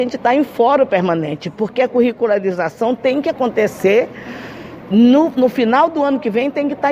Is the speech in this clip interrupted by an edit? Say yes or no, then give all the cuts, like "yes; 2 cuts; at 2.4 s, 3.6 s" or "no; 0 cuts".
no; 0 cuts